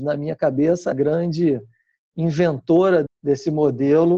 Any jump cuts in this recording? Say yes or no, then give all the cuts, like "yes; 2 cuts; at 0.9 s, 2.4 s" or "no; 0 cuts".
yes; 2 cuts; at 0.9 s, 3.1 s